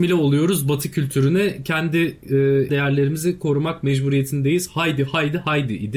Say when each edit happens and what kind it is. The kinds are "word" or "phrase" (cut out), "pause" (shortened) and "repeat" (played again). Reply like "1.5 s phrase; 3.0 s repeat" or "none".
2.7 s word